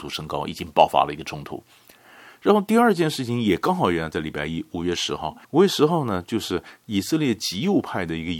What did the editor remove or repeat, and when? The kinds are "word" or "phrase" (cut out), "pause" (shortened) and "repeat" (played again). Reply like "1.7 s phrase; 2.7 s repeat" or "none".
5.4 s pause